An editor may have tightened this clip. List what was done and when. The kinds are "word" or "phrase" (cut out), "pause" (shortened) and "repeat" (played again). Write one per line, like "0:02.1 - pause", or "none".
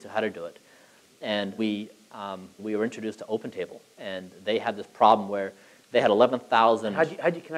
0:01.6 - word
0:02.6 - word

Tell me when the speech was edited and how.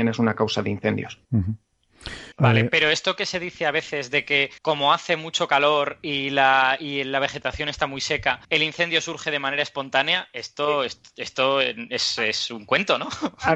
0:01.2 - pause
0:02.3 - pause
0:04.6 - pause
0:08.4 - pause

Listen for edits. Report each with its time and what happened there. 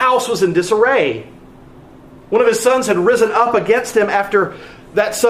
none

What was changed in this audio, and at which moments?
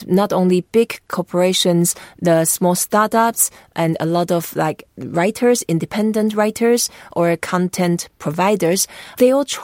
none

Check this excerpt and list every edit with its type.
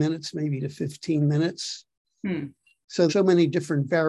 0:03.1 - word

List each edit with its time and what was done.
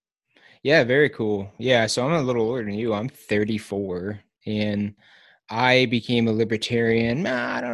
none

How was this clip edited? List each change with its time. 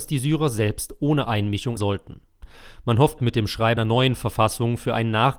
0:01.2 - word
0:01.8 - word
0:03.2 - word
0:03.8 - word

